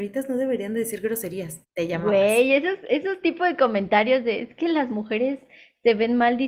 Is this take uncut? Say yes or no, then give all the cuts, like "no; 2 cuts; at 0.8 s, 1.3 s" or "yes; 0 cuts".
no; 1 cut; at 1.6 s